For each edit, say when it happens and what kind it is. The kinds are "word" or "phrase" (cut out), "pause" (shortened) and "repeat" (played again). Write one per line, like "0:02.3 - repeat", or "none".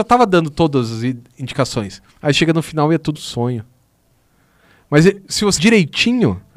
0:02.1 - pause
0:03.1 - word
0:05.6 - word